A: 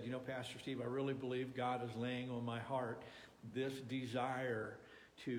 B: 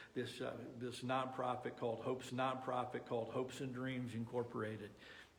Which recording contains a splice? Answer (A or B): B